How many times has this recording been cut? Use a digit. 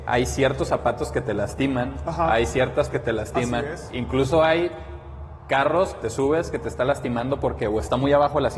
3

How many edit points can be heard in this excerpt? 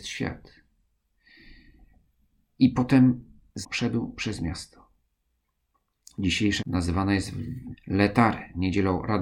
4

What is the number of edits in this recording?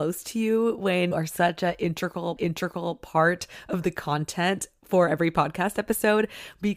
2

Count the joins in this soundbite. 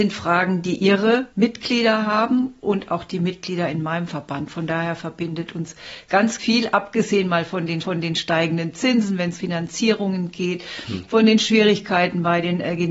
4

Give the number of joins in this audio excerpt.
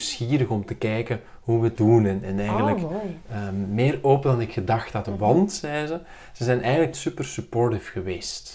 2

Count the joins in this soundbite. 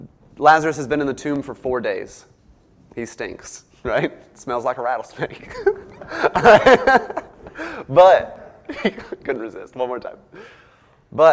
0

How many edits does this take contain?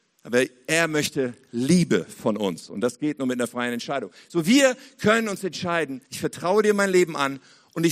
1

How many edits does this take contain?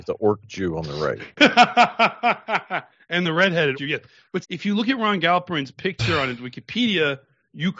2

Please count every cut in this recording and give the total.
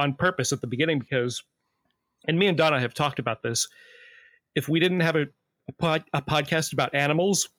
0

